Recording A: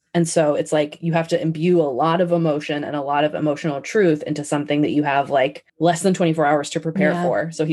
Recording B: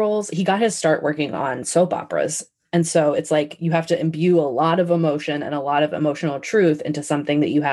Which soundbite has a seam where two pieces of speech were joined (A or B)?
A